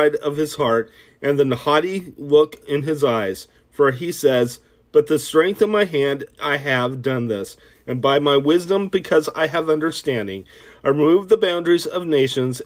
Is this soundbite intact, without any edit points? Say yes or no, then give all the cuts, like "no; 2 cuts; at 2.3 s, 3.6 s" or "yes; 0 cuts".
yes; 0 cuts